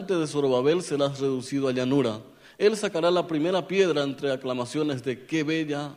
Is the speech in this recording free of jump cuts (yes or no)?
yes